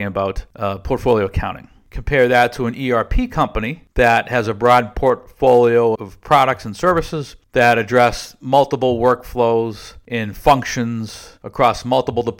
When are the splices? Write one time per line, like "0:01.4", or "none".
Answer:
0:06.0